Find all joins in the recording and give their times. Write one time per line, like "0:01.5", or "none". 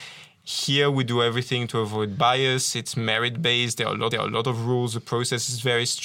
0:04.1